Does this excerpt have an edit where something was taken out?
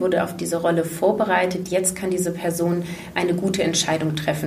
no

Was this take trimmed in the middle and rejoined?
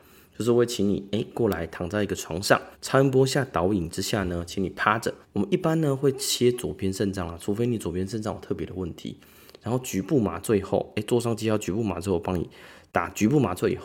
yes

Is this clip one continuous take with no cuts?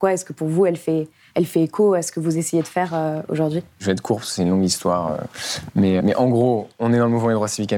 no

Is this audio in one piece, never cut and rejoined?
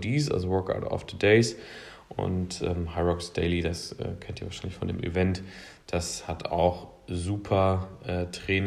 yes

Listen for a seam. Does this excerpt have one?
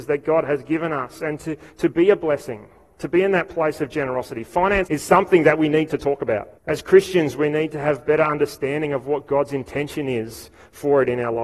yes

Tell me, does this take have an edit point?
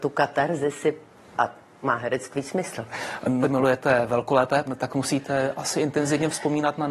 yes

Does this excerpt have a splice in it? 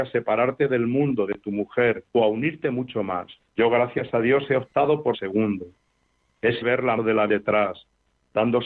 yes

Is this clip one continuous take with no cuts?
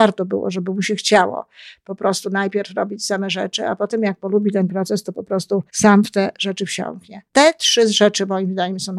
no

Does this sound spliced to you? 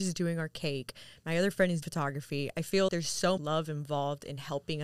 yes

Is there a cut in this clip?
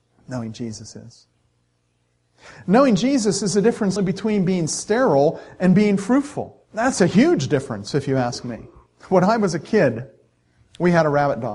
yes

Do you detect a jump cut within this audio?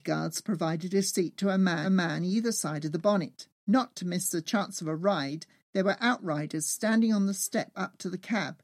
yes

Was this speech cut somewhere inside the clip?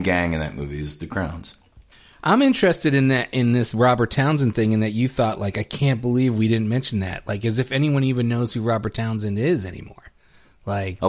yes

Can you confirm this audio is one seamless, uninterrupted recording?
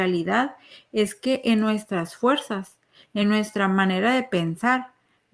yes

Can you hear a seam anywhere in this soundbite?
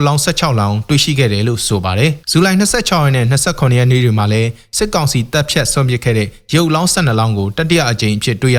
yes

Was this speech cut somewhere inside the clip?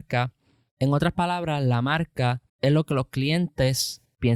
yes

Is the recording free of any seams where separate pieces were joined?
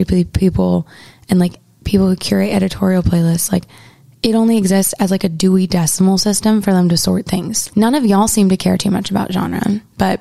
no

